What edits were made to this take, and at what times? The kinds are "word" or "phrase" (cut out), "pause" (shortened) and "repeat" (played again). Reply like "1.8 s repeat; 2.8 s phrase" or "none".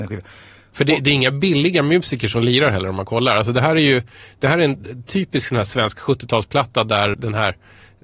7.1 s word